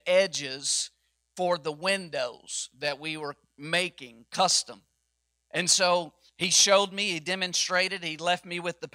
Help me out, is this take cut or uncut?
uncut